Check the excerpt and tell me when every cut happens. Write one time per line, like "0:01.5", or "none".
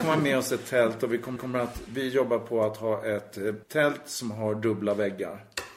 0:01.4
0:03.6